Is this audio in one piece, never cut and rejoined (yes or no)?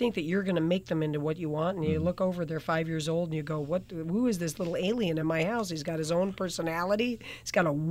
yes